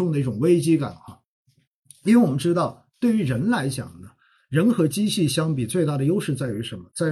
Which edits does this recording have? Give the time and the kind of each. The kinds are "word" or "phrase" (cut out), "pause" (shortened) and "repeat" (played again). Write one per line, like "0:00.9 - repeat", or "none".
none